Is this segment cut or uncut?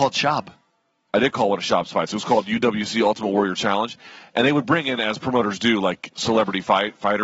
uncut